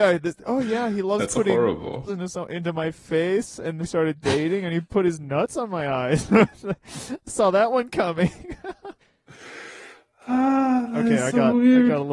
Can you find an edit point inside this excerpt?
yes; 3 cuts; at 2.1 s, 3.8 s, 9.0 s

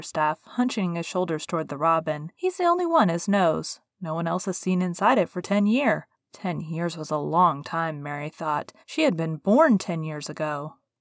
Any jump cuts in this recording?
yes; 3 cuts; at 2.3 s, 6.1 s, 8.8 s

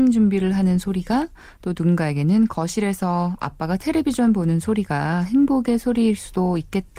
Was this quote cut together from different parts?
no; 0 cuts

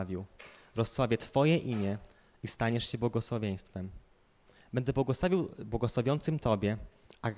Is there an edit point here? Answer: no; 0 cuts

